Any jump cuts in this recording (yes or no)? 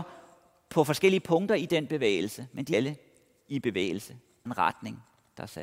yes